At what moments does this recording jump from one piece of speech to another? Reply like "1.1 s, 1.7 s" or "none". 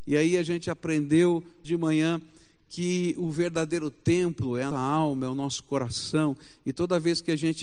1.6 s, 4.7 s